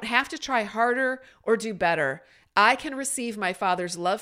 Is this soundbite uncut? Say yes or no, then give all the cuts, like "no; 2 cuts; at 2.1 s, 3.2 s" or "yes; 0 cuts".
yes; 0 cuts